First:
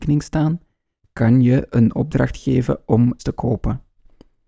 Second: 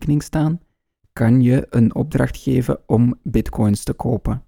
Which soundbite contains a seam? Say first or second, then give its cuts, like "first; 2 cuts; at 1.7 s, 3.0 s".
first; 1 cut; at 3.2 s